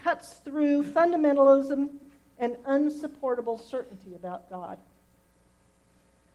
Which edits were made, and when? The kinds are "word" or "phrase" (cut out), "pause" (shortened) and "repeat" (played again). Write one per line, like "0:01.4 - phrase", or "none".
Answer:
none

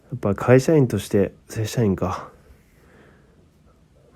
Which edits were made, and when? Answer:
0:01.4 - pause

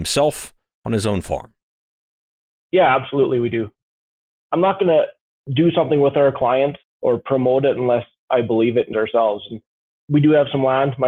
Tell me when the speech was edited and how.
0:06.8 - word
0:08.9 - word

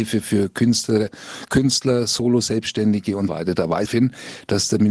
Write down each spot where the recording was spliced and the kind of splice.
0:03.3 - word
0:03.9 - phrase

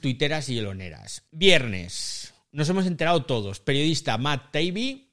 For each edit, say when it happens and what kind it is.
0:01.3 - pause

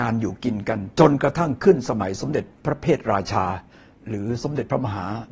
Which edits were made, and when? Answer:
none

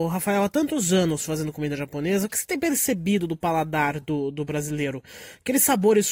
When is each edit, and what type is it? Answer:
none

